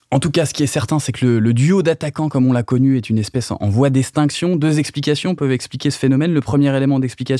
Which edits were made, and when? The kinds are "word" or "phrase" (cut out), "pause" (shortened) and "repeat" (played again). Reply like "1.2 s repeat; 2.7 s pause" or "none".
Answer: none